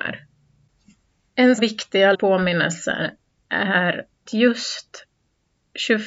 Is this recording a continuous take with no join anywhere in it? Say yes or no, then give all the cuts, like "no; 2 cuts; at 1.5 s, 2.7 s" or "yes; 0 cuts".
no; 3 cuts; at 1.6 s, 2.1 s, 4.3 s